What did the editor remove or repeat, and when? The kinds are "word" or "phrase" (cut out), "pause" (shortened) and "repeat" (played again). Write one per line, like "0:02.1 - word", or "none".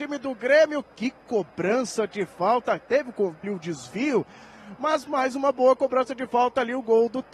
0:03.4 - word